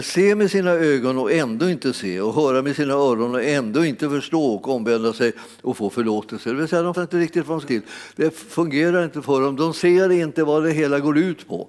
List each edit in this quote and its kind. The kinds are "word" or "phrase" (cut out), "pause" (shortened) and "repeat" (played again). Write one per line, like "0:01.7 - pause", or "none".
0:06.9 - word
0:07.6 - phrase